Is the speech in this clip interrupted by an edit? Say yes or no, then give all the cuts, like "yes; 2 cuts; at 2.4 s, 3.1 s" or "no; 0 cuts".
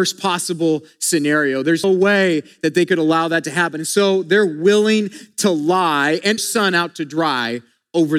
yes; 2 cuts; at 1.8 s, 6.4 s